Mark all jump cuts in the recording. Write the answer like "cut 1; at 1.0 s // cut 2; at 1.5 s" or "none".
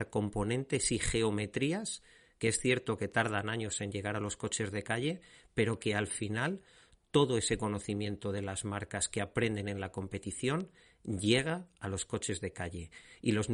none